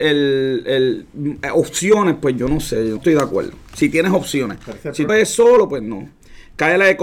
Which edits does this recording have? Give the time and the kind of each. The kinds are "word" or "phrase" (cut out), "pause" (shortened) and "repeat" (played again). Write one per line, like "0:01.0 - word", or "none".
0:03.0 - word
0:05.1 - word